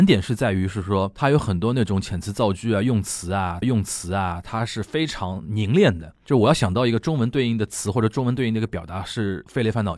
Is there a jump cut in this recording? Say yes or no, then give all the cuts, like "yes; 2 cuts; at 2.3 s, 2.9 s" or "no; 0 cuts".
yes; 1 cut; at 3.6 s